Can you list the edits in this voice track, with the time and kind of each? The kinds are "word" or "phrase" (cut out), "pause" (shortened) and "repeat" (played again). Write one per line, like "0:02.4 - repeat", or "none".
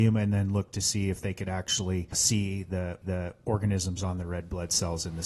0:03.0 - repeat